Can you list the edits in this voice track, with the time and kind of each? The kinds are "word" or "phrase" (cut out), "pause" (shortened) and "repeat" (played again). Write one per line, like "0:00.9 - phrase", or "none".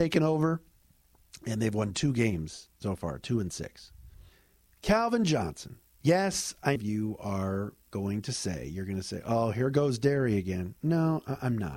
0:04.3 - pause
0:06.8 - phrase